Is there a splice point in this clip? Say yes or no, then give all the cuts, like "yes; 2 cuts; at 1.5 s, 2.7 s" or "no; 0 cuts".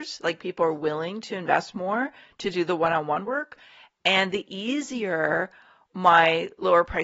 no; 0 cuts